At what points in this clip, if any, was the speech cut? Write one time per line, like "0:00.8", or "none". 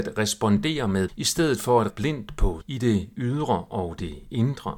0:01.1
0:01.9
0:02.6